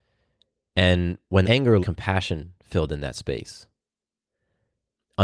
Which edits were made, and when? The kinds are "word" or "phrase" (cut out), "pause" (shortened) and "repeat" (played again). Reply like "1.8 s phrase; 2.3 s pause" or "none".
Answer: 1.4 s word; 1.8 s word